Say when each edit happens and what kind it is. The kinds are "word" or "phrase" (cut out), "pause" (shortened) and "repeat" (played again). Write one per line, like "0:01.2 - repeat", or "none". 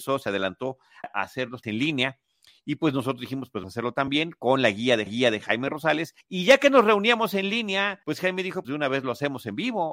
0:01.0 - word
0:01.6 - word
0:03.6 - word
0:05.1 - repeat
0:06.2 - pause
0:08.0 - pause
0:08.6 - word